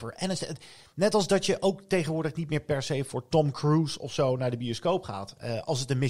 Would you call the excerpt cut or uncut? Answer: uncut